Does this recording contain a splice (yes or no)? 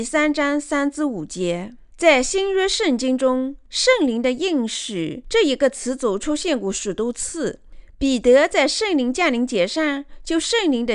no